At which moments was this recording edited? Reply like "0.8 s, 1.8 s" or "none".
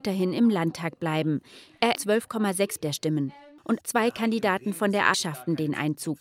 1.9 s, 2.8 s, 3.8 s, 5.1 s